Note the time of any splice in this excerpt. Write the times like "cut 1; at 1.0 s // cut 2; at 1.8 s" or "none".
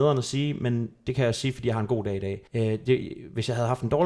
cut 1; at 2.5 s